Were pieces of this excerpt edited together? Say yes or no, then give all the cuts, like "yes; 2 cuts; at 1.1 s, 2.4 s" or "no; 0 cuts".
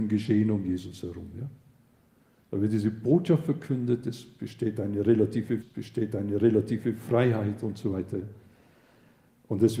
yes; 1 cut; at 5.6 s